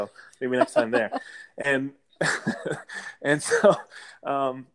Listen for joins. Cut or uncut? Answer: uncut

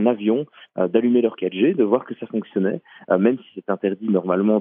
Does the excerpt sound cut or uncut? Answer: uncut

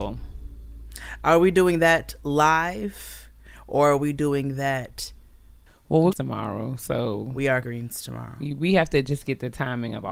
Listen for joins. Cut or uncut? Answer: cut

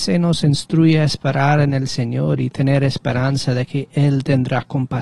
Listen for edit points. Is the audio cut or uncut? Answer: uncut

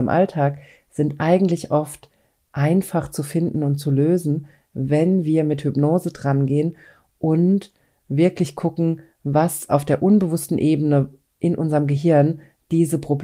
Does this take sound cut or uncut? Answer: uncut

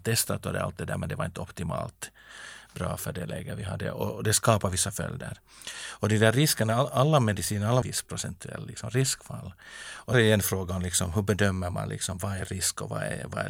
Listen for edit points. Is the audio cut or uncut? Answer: cut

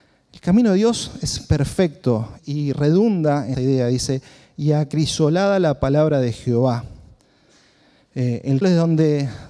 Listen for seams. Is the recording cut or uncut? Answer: cut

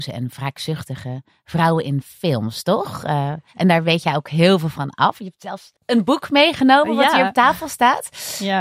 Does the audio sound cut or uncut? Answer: cut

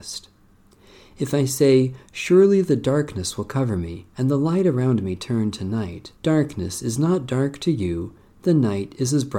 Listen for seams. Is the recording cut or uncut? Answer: cut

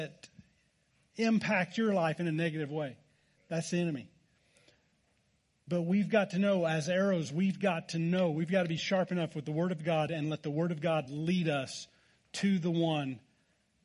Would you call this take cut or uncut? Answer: uncut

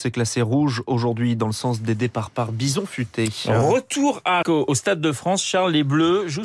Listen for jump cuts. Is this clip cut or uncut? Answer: cut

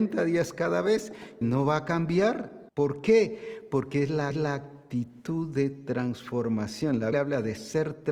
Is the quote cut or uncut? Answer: cut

